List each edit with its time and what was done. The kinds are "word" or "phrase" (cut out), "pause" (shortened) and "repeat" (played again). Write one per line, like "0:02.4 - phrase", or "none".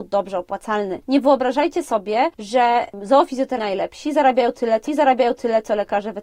0:03.6 - phrase
0:04.9 - repeat